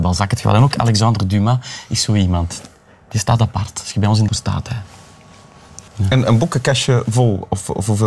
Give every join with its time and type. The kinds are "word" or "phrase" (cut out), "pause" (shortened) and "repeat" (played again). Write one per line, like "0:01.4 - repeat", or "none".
0:04.3 - phrase
0:05.9 - pause